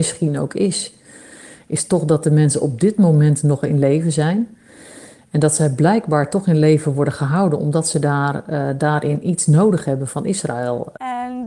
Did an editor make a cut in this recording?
no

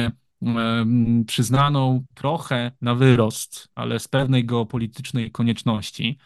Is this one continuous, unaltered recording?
yes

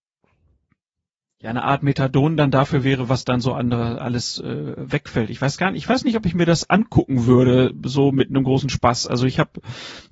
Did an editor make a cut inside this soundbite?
no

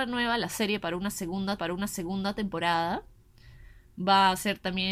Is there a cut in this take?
yes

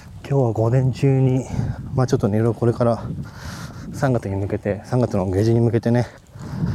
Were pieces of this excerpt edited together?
no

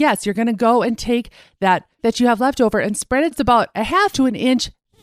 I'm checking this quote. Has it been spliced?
yes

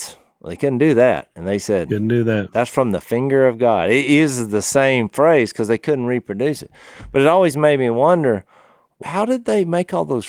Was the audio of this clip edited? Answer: yes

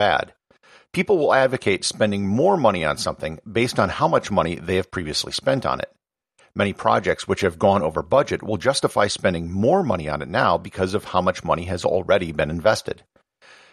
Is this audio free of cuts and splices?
yes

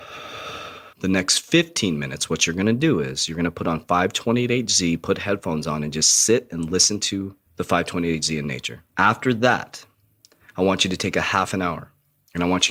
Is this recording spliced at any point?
yes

